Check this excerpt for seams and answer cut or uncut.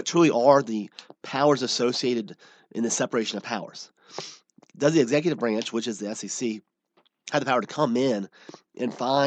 uncut